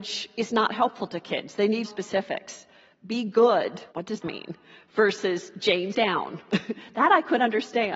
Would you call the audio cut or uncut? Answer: cut